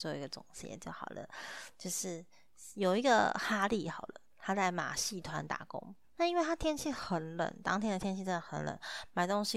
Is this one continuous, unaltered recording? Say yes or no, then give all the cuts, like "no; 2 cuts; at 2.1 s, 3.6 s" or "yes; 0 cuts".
no; 1 cut; at 6.0 s